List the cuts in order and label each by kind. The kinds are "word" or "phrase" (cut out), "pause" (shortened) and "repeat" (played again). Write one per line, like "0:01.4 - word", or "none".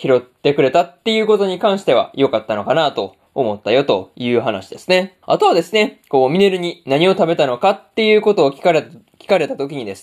0:05.2 - pause